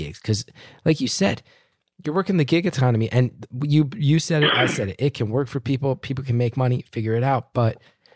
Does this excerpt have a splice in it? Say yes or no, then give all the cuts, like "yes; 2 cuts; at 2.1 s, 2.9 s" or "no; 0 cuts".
no; 0 cuts